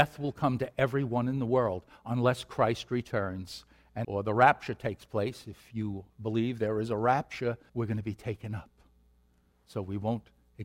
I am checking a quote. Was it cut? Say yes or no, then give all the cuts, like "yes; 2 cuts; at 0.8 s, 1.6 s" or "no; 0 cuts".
yes; 3 cuts; at 4.0 s, 6.1 s, 7.7 s